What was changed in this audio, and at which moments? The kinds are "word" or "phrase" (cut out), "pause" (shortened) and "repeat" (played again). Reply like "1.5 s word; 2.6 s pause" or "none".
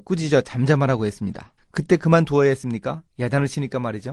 1.6 s pause